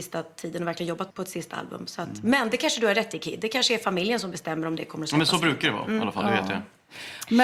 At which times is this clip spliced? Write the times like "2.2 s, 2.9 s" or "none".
1.1 s